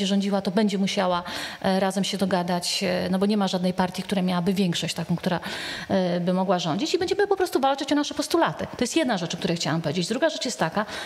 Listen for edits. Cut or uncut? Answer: uncut